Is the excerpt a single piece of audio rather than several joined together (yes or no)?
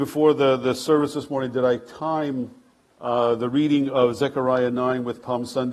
yes